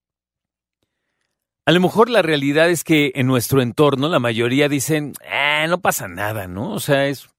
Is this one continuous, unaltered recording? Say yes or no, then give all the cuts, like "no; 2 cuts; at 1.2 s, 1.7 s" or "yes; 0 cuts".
yes; 0 cuts